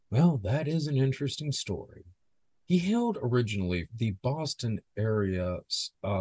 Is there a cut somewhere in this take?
yes; 2 cuts; at 2.2 s, 3.9 s

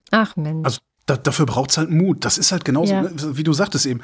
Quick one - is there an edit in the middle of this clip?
no; 0 cuts

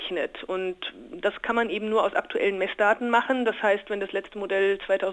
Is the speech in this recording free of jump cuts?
yes; 0 cuts

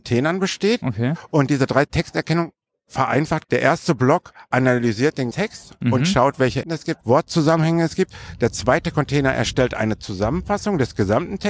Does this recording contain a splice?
yes; 4 cuts; at 3.4 s, 5.3 s, 6.6 s, 7.0 s

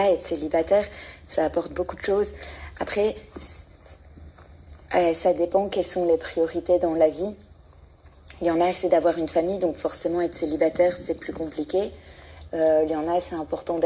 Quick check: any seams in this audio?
no; 0 cuts

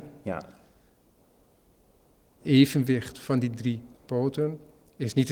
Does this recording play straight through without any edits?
no; 2 cuts; at 2.4 s, 3.9 s

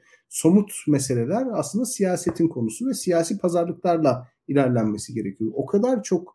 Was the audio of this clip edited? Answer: no; 0 cuts

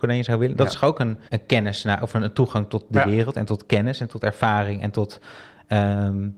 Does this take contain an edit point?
yes; 1 cut; at 1.3 s

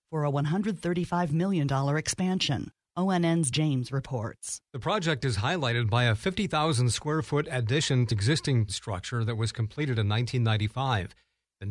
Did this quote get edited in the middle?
yes; 3 cuts; at 3.5 s, 8.1 s, 8.7 s

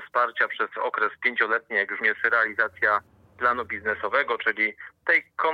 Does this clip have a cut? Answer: yes; 1 cut; at 2.0 s

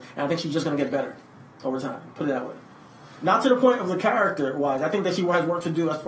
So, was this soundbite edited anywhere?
no; 0 cuts

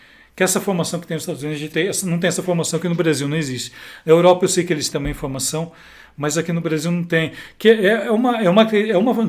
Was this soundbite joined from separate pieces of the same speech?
yes; 2 cuts; at 1.7 s, 4.9 s

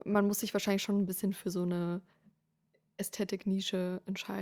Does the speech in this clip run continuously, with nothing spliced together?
yes; 0 cuts

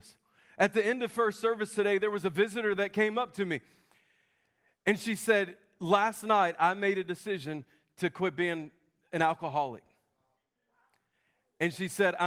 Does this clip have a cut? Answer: no; 0 cuts

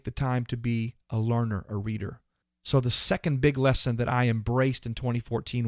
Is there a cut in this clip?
no; 0 cuts

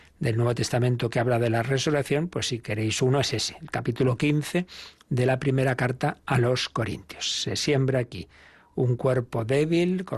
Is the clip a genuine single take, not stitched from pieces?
yes; 0 cuts

